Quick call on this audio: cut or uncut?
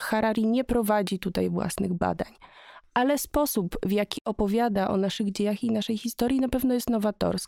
uncut